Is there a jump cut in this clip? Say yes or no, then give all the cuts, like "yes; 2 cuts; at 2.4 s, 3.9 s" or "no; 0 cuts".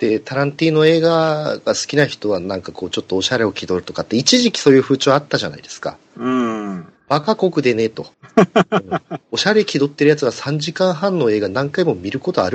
yes; 2 cuts; at 8.1 s, 9.2 s